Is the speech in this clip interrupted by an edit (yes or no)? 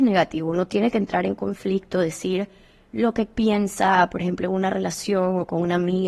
no